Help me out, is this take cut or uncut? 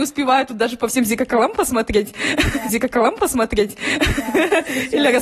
cut